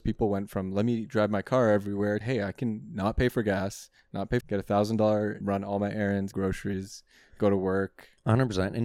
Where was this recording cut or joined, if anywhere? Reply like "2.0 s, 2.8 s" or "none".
2.2 s, 4.4 s, 5.4 s, 6.3 s